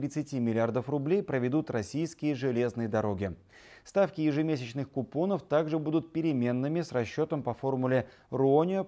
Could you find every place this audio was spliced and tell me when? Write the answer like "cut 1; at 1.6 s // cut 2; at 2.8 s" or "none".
none